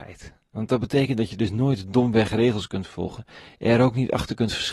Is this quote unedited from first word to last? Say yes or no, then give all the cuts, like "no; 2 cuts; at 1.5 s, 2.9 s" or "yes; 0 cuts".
yes; 0 cuts